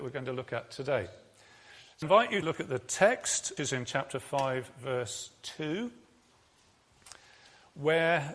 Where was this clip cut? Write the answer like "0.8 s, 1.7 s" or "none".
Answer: 2.0 s, 2.4 s, 3.6 s

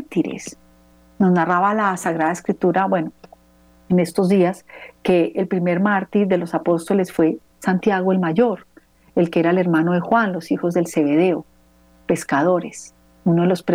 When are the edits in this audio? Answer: none

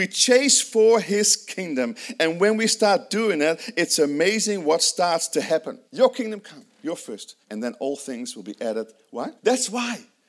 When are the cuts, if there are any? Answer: 5.8 s, 7.4 s, 9.4 s

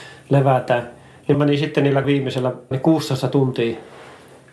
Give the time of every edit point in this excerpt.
1.3 s, 2.0 s, 2.7 s

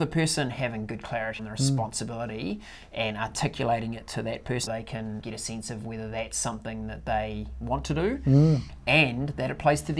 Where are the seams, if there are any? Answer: 1.4 s, 4.7 s, 5.2 s

